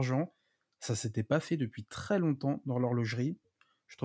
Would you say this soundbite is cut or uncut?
uncut